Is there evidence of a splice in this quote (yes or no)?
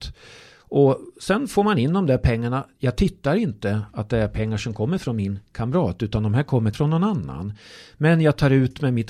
yes